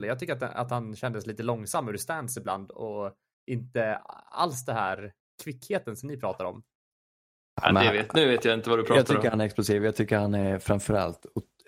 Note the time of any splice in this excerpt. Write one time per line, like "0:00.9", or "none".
none